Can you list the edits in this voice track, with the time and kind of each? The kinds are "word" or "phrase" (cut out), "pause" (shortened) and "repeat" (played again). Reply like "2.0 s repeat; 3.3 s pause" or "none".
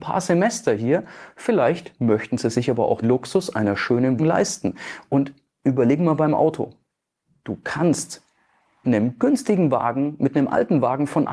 3.0 s word; 4.2 s word; 8.8 s word